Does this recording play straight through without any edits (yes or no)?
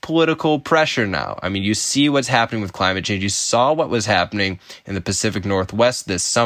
yes